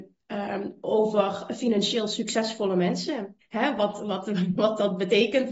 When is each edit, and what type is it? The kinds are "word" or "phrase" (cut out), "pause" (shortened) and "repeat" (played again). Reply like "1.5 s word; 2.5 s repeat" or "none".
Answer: 3.4 s pause